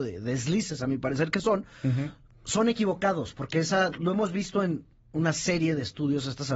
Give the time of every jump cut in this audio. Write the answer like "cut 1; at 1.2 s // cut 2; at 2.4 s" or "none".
cut 1; at 3.9 s